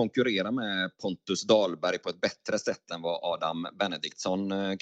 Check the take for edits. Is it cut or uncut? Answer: uncut